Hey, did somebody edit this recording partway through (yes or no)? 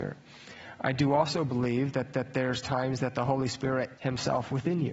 yes